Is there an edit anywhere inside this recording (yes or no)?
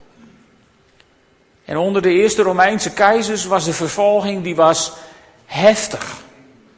no